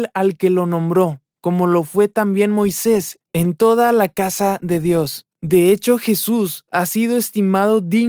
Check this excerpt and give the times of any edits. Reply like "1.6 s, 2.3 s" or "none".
none